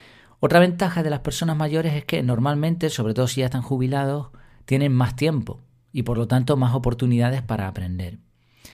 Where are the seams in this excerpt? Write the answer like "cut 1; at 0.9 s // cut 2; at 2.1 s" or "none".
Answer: none